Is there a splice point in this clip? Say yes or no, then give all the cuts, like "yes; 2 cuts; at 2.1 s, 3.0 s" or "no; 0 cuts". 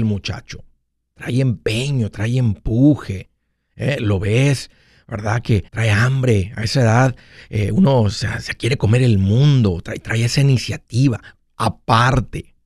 yes; 1 cut; at 5.7 s